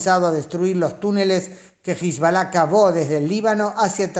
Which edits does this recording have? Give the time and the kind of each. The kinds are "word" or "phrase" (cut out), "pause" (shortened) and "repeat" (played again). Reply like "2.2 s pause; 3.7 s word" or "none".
none